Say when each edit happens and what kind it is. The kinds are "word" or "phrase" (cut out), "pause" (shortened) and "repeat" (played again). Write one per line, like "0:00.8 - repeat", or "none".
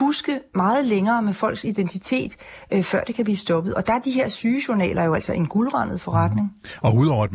none